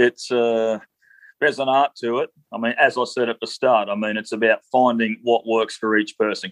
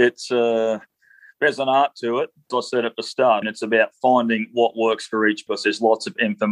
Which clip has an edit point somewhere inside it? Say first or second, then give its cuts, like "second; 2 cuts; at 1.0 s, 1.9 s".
second; 3 cuts; at 2.5 s, 3.4 s, 5.5 s